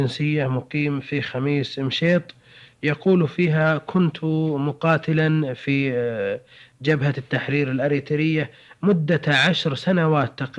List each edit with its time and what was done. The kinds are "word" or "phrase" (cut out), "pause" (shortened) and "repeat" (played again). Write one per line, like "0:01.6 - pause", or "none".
none